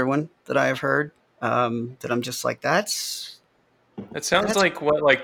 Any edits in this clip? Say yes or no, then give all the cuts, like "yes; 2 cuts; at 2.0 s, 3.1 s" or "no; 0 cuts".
yes; 1 cut; at 1.2 s